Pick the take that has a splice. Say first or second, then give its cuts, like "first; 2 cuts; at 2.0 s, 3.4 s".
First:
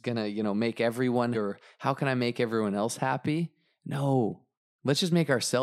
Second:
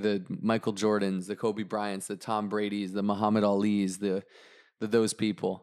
first; 1 cut; at 1.3 s